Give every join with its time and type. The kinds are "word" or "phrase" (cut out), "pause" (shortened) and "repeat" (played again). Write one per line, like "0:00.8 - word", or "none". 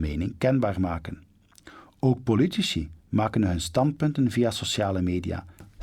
0:03.0 - pause